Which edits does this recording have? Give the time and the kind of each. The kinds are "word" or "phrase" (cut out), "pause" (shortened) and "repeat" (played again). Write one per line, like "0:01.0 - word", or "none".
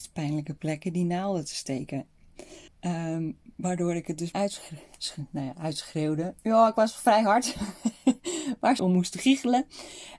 0:02.7 - pause
0:04.3 - word
0:06.4 - pause
0:08.8 - phrase